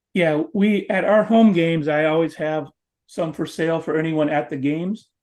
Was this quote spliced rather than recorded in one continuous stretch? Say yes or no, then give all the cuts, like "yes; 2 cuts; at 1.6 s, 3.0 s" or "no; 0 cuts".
no; 0 cuts